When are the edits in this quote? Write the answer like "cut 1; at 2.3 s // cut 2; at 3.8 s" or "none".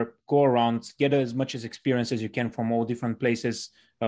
none